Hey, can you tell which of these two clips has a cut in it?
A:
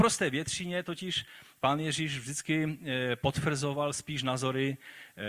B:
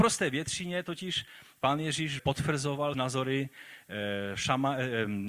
B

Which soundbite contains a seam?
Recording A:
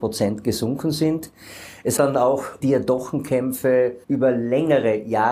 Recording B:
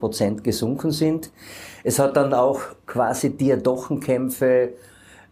A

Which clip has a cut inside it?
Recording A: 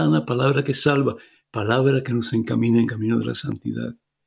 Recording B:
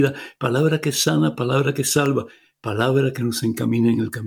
A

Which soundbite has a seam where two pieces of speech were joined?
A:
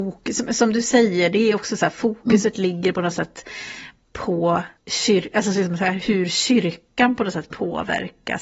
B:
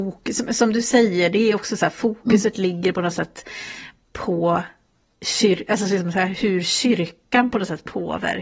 A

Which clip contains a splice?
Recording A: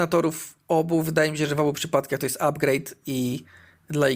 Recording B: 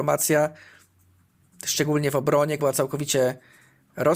B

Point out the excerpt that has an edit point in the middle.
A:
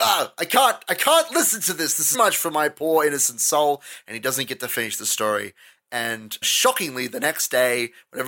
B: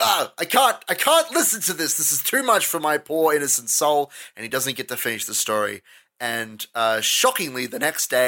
A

